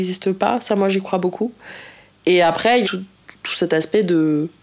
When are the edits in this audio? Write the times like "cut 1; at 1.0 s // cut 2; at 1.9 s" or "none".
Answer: cut 1; at 2.8 s